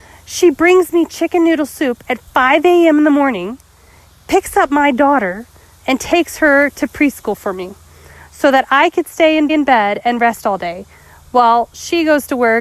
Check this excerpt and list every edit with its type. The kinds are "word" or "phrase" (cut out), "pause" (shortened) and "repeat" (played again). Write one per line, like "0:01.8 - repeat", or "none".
0:09.5 - repeat